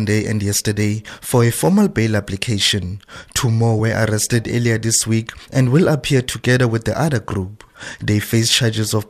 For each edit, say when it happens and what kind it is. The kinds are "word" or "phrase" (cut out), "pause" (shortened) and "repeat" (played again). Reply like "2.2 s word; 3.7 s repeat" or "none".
none